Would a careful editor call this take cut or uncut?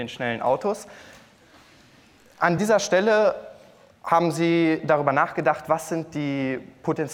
uncut